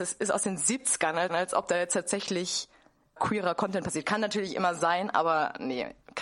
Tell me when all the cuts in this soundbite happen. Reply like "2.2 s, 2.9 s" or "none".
1.3 s, 3.2 s